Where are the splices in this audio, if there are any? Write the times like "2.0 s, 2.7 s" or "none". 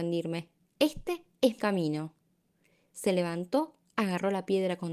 1.6 s